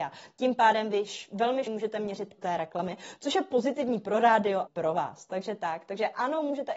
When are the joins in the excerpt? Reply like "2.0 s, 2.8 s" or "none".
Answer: 1.7 s, 2.4 s, 4.7 s